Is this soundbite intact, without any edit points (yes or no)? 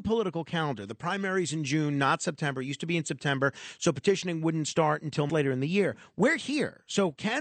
no